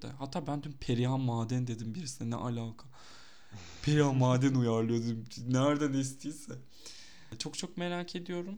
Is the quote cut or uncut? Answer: uncut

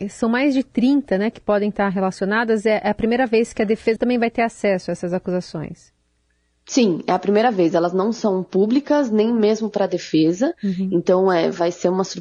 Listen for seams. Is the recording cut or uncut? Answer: cut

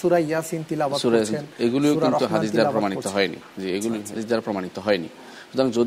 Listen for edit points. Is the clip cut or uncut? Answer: cut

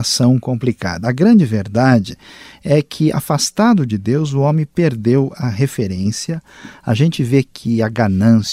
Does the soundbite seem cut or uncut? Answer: uncut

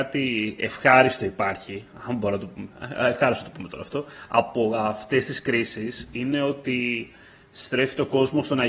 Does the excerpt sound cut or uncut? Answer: uncut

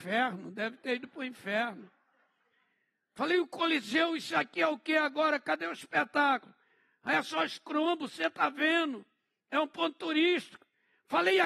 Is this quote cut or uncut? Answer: uncut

